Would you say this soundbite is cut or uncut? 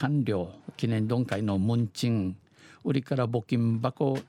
uncut